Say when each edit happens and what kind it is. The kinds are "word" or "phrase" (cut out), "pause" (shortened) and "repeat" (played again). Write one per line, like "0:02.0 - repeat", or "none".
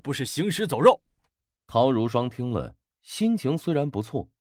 0:01.1 - pause

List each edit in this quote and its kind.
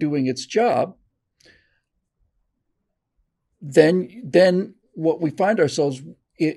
none

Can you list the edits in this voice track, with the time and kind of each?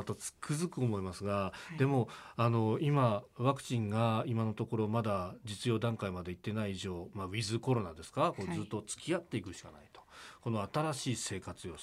none

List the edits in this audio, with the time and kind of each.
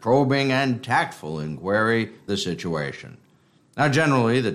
0:02.3 - word

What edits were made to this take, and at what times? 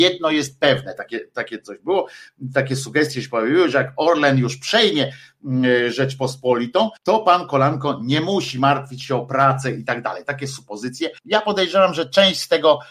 0:07.0 - pause
0:11.2 - pause

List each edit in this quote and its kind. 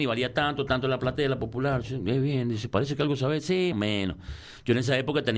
0:03.7 - word

